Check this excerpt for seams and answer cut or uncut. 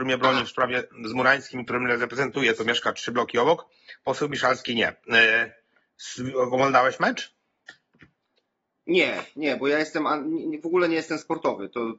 uncut